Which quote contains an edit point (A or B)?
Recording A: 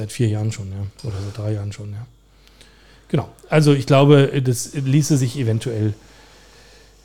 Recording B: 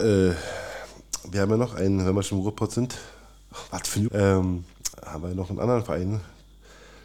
B